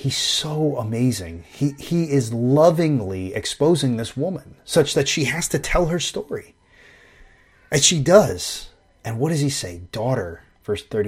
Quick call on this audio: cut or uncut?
uncut